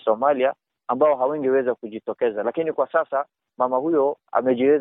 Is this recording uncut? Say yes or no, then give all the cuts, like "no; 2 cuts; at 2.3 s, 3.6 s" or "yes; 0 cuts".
yes; 0 cuts